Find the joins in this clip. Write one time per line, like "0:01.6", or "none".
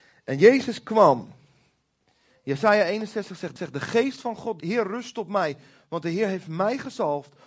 0:03.6
0:04.6